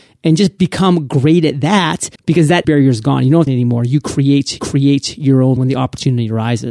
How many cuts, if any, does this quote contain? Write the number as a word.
five